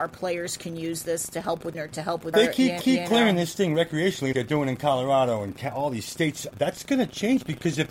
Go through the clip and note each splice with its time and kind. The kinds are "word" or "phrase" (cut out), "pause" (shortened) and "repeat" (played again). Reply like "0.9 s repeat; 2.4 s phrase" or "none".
1.7 s phrase; 2.3 s phrase; 2.8 s repeat; 4.3 s word; 6.5 s word